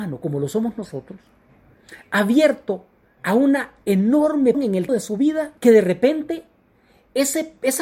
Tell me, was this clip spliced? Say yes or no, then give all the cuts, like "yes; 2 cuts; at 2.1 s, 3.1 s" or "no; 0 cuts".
yes; 4 cuts; at 3.1 s, 4.5 s, 4.9 s, 5.6 s